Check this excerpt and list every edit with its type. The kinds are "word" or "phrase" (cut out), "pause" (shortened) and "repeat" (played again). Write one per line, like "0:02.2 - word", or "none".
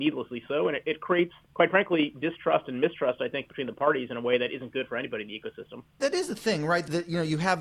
0:01.4 - pause